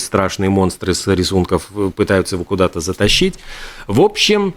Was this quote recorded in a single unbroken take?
yes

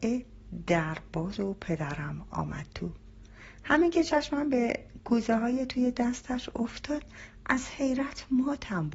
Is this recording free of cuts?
no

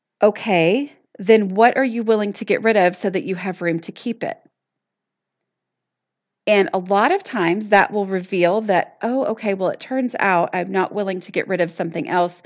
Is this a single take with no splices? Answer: yes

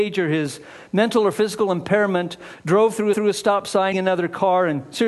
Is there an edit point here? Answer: yes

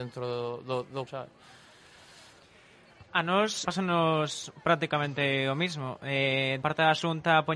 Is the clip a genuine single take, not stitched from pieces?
no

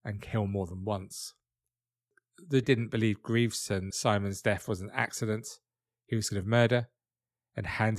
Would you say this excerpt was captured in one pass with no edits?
no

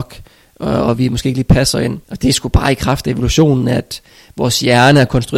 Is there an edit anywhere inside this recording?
yes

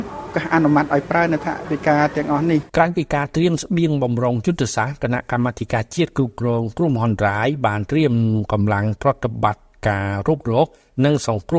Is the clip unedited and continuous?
no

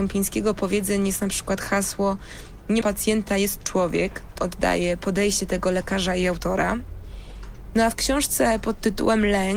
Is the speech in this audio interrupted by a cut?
yes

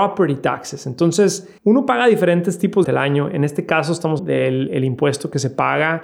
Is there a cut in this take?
yes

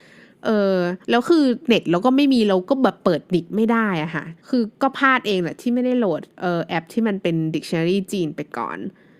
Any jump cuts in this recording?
yes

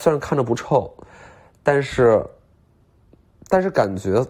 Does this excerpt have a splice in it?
no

